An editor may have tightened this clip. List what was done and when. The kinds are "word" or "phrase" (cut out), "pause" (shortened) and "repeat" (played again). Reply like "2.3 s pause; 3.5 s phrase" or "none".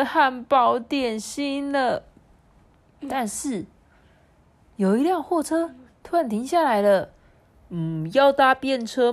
none